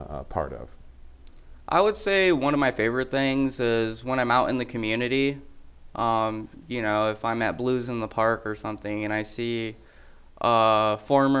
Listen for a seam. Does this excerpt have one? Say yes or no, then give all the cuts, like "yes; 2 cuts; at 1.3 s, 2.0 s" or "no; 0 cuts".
no; 0 cuts